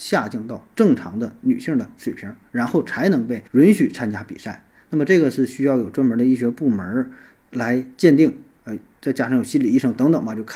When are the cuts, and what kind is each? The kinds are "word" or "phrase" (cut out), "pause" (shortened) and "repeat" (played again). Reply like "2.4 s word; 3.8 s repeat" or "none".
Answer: 3.5 s pause

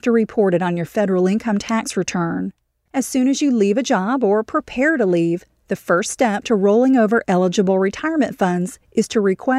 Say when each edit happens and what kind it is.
none

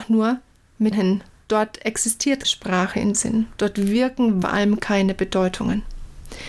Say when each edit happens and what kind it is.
0.9 s word; 1.3 s pause; 2.4 s word; 3.1 s word; 4.4 s phrase

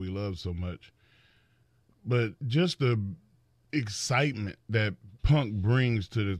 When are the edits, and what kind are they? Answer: 2.4 s pause; 3.4 s pause; 5.2 s pause

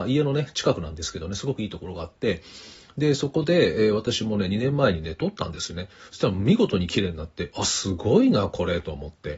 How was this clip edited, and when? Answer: none

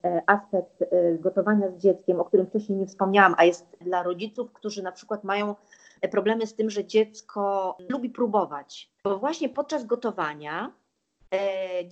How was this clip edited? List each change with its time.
3.8 s word; 7.9 s word; 9.0 s pause

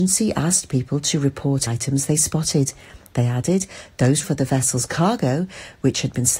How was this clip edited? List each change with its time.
1.7 s word; 4.2 s word

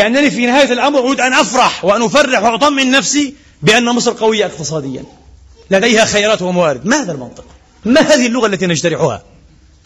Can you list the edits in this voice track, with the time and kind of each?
none

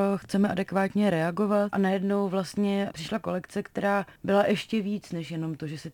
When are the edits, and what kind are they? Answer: 1.7 s word; 2.9 s word; 4.2 s pause

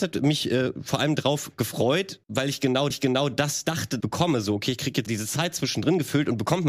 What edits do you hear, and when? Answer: 2.2 s pause; 2.9 s repeat; 4.0 s phrase; 5.1 s word

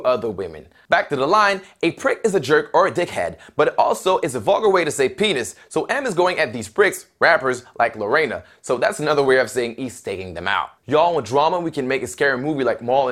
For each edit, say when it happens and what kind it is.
10.8 s pause

